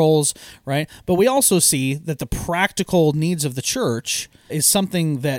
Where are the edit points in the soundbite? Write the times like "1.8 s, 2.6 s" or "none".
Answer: 4.5 s